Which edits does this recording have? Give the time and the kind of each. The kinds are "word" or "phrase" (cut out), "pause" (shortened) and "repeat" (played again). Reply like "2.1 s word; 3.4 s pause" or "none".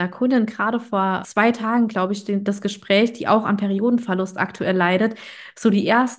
1.2 s word